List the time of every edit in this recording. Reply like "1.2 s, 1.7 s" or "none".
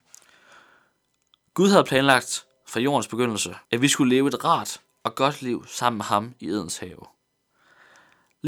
3.6 s